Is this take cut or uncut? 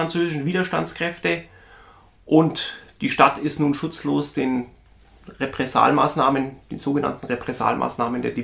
uncut